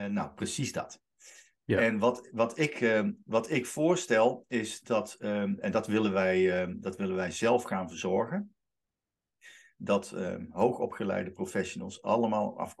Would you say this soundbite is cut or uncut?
uncut